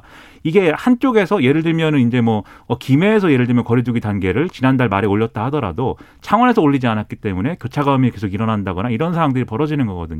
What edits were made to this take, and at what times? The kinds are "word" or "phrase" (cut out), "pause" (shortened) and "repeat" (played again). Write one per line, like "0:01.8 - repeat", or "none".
none